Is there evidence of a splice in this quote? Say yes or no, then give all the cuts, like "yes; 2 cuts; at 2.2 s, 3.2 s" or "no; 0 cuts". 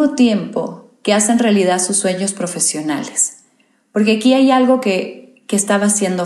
no; 0 cuts